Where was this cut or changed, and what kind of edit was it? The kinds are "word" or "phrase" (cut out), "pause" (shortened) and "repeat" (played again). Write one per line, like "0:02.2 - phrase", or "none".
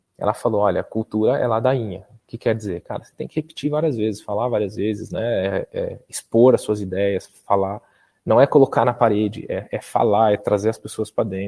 none